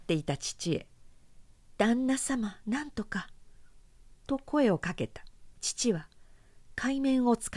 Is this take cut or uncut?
cut